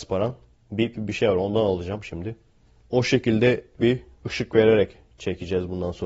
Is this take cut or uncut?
cut